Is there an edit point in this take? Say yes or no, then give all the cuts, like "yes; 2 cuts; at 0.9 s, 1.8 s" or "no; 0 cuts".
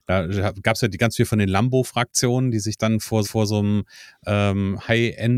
yes; 1 cut; at 3.2 s